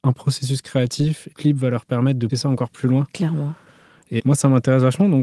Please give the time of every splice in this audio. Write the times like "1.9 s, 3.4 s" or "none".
1.3 s, 2.3 s, 4.2 s